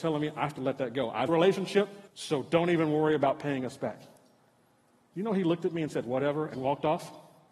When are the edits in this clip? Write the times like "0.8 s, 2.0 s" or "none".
1.3 s, 2.1 s

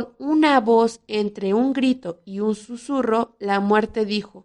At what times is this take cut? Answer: none

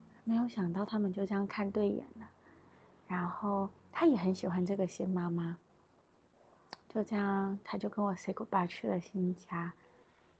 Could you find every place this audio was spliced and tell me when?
3.8 s, 6.8 s

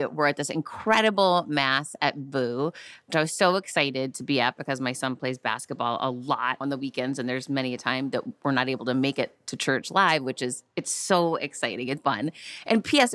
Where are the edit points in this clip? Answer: 6.6 s, 12.0 s

